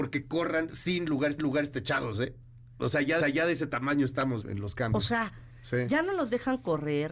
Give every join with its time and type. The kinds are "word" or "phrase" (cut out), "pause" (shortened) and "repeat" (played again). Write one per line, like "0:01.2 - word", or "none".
0:01.4 - repeat
0:03.2 - repeat
0:04.4 - word